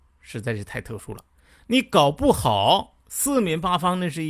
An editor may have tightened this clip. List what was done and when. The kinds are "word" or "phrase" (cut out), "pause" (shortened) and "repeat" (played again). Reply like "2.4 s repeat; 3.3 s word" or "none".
none

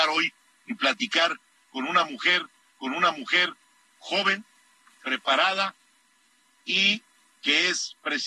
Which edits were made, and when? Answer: 2.6 s repeat

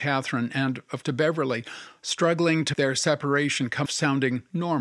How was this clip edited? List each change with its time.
1.0 s word; 2.7 s word; 3.9 s word

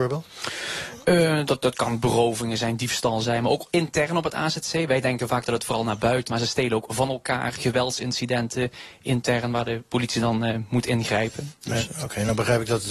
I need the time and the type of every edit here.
6.3 s word

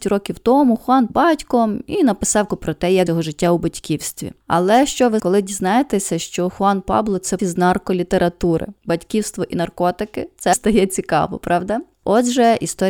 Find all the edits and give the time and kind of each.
1.1 s phrase; 2.5 s word; 3.1 s word; 5.2 s word; 7.4 s word; 10.5 s word

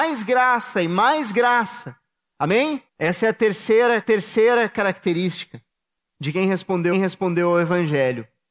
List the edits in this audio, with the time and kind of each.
2.9 s pause; 4.0 s repeat; 6.9 s repeat

